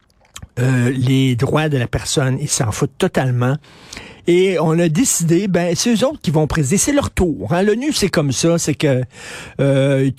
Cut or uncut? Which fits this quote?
uncut